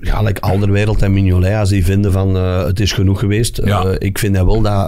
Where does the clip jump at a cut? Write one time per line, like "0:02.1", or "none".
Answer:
none